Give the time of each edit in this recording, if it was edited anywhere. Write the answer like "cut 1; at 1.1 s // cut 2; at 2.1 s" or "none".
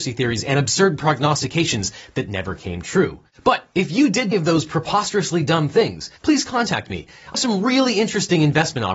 cut 1; at 3.3 s // cut 2; at 4.3 s // cut 3; at 6.2 s // cut 4; at 7.3 s